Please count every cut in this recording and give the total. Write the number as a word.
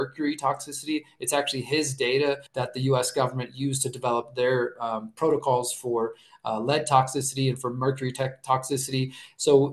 one